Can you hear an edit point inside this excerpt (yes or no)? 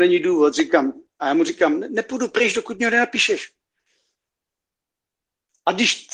no